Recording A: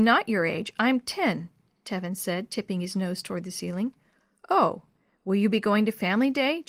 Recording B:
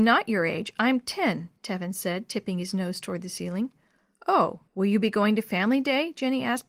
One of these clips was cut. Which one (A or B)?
B